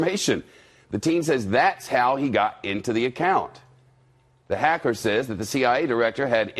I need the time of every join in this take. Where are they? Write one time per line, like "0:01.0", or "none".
none